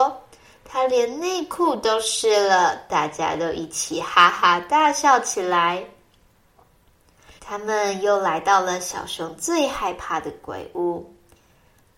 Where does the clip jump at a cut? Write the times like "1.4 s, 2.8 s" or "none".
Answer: 7.4 s